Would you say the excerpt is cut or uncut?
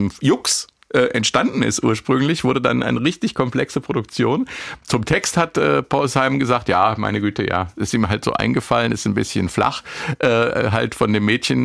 uncut